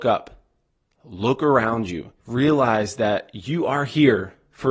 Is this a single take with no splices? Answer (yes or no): no